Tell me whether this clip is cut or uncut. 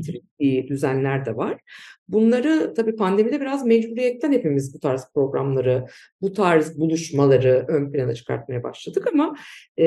uncut